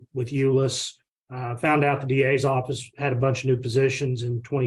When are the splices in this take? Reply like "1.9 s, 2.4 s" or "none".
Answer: 1.1 s